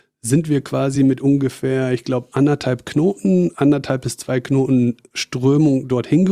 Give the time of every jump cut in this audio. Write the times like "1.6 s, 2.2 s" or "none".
none